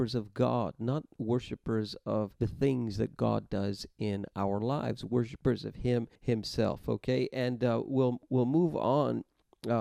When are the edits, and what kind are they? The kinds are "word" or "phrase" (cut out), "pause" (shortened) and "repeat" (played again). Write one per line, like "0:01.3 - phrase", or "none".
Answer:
0:02.4 - pause
0:06.2 - pause